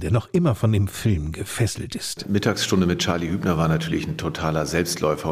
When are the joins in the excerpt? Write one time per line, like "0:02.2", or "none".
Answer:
none